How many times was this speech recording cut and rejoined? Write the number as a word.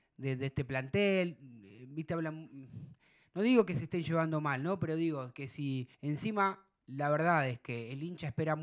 one